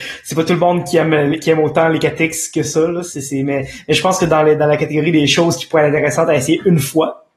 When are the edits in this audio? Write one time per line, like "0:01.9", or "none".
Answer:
none